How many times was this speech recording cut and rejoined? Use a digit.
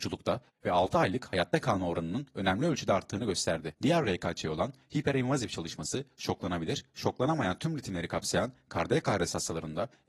0